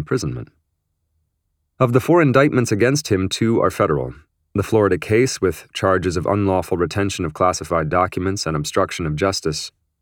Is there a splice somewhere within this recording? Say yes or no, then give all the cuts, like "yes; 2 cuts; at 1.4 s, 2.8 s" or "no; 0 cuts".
no; 0 cuts